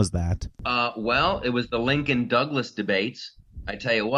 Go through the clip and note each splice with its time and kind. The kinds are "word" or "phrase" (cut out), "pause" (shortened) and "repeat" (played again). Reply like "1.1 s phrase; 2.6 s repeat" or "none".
none

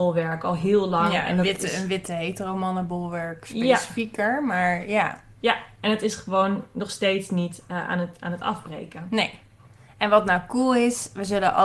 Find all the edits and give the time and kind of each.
none

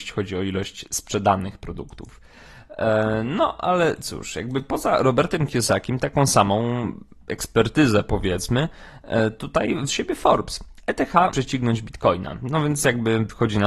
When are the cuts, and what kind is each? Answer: 9.9 s word; 11.3 s word

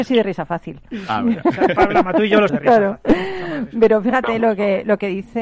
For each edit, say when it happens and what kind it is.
2.5 s word

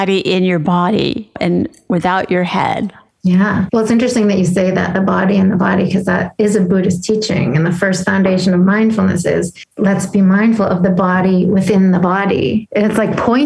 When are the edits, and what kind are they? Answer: none

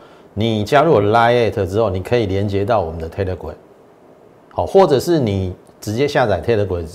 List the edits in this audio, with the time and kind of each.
none

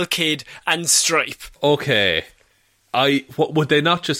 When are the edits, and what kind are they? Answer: 1.5 s pause

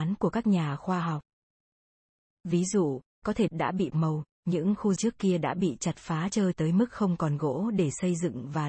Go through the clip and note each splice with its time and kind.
3.5 s word; 3.9 s word; 5.0 s word; 6.5 s word

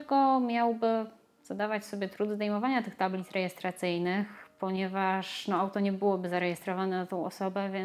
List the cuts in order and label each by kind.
none

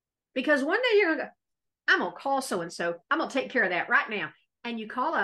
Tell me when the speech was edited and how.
none

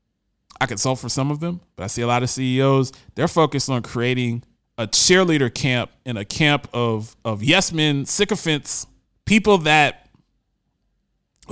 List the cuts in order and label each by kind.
4.6 s pause; 9.1 s pause

